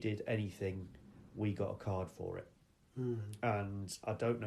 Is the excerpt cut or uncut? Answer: uncut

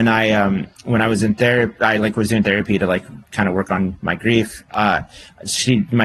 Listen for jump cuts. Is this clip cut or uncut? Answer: uncut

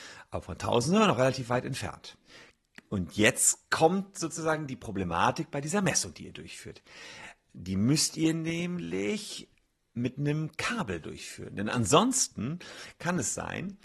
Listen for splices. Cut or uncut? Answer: uncut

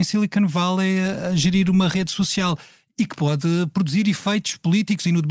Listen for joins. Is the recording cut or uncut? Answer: uncut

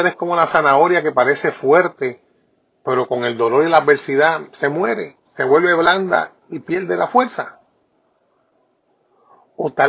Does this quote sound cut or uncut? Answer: cut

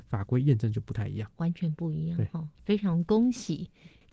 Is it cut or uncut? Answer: cut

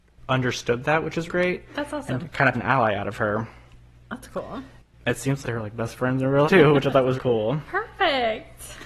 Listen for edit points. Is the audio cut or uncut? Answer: cut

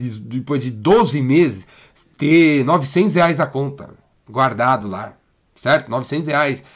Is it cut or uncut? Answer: uncut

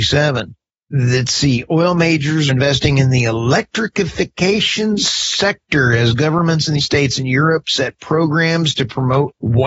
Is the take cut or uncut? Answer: cut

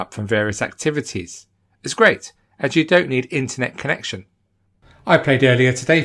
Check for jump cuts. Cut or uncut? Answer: uncut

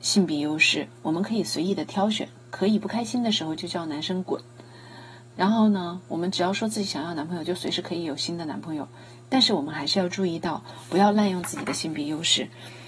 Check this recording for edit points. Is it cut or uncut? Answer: uncut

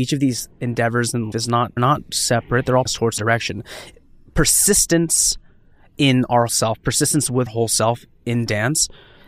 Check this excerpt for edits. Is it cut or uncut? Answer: cut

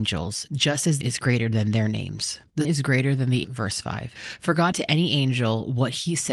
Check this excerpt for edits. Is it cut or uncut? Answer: cut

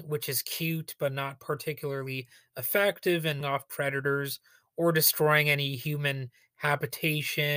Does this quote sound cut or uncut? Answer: cut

